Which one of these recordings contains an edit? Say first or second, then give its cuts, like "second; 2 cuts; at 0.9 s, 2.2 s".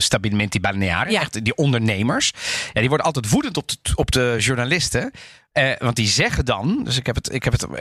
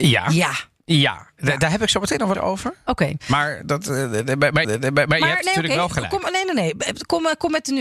second; 3 cuts; at 2.3 s, 3.6 s, 4.6 s